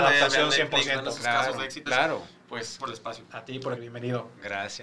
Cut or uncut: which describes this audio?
cut